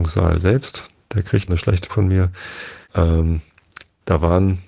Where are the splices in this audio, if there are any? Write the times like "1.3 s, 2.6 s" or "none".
1.5 s, 1.9 s, 2.8 s